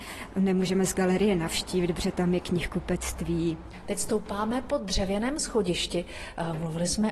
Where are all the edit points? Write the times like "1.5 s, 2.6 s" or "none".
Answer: none